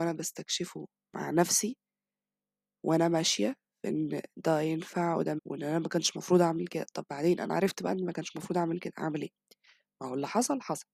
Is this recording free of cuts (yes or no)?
no